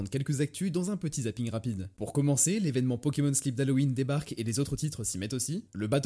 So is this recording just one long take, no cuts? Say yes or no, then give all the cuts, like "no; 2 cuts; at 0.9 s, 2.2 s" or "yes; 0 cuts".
yes; 0 cuts